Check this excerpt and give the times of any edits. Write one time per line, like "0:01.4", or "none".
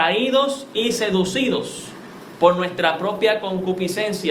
none